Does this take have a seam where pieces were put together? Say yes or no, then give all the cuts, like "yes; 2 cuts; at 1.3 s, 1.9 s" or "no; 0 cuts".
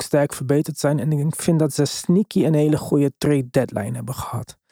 no; 0 cuts